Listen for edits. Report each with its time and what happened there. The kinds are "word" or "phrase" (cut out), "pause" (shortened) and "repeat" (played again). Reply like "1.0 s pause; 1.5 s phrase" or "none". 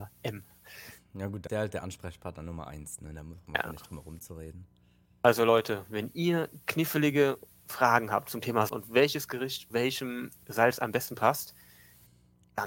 1.5 s word; 8.7 s word; 9.7 s word

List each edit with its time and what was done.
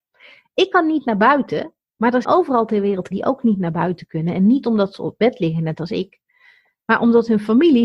2.2 s word; 3.1 s word

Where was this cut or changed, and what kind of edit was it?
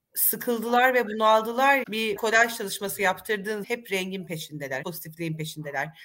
1.8 s word; 2.2 s word; 3.6 s word; 4.8 s word

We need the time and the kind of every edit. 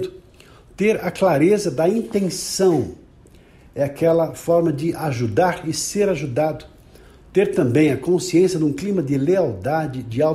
none

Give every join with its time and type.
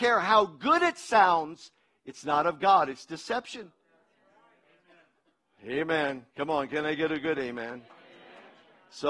none

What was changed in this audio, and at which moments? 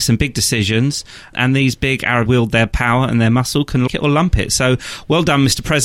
2.3 s phrase; 3.9 s word

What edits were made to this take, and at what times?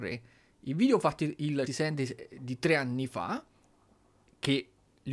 1.7 s phrase

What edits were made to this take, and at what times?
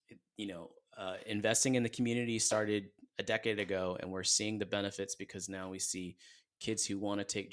none

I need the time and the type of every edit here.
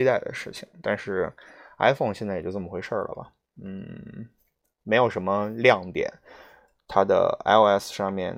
none

